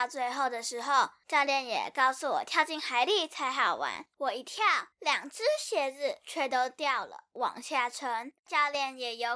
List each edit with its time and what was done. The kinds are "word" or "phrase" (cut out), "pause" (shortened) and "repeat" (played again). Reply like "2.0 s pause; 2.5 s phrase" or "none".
4.1 s pause; 4.9 s pause; 8.4 s pause